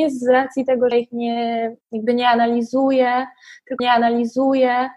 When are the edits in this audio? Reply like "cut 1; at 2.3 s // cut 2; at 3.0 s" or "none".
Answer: cut 1; at 0.9 s // cut 2; at 1.8 s // cut 3; at 3.8 s